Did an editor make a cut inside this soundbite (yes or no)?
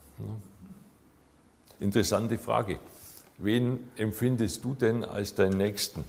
no